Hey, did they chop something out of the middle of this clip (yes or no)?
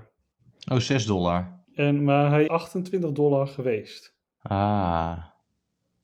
yes